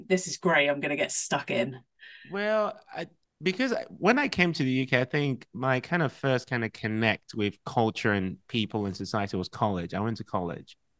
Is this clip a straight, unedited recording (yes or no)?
no